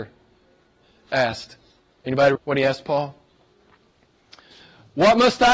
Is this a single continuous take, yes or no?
no